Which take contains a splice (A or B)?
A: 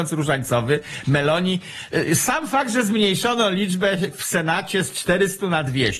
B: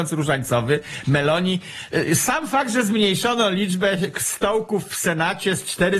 A